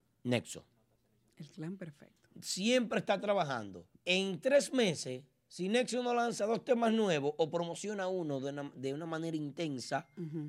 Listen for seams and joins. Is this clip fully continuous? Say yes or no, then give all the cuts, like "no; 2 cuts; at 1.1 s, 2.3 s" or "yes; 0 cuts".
no; 1 cut; at 3.9 s